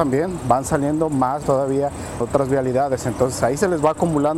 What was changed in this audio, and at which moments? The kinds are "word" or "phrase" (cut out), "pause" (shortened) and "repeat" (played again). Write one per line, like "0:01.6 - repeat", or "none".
0:01.4 - word
0:02.2 - word

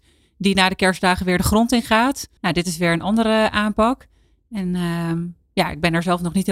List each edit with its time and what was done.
0:02.4 - pause

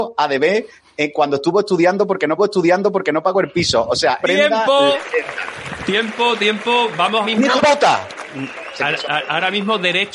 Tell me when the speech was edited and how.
0:02.4 - repeat
0:04.2 - phrase
0:07.2 - word
0:07.6 - phrase

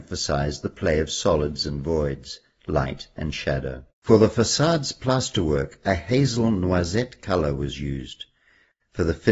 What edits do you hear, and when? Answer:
0:03.9 - pause

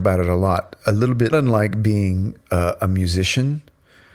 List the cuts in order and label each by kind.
0:01.3 - phrase
0:02.4 - pause

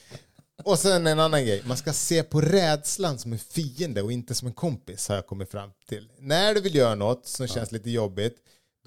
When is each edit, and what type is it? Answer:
none

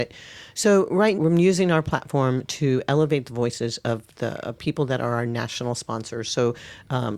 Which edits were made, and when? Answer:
0:01.1 - word

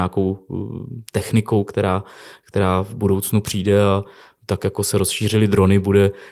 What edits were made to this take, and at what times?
none

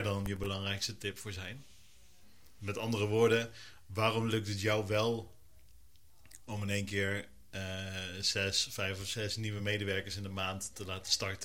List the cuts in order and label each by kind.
none

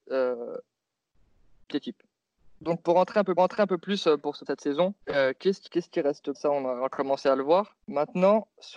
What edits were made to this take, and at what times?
0:01.7 - word
0:02.4 - pause
0:03.4 - repeat
0:04.5 - word
0:05.0 - pause
0:05.7 - word
0:06.3 - word
0:07.8 - pause

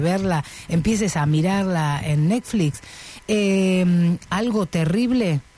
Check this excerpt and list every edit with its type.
none

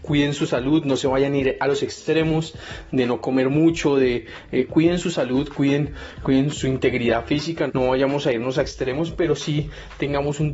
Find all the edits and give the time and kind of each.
0:04.7 - word
0:06.5 - word
0:07.7 - word

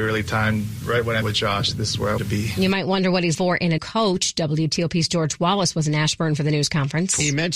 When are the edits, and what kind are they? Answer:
0:01.2 - word
0:02.2 - word
0:03.3 - word
0:03.8 - word

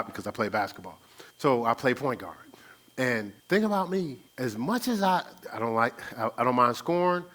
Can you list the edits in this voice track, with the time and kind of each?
0:01.3 - pause
0:03.4 - pause
0:04.3 - pause

